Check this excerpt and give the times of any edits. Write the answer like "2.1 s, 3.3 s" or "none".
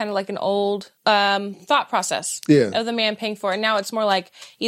1.0 s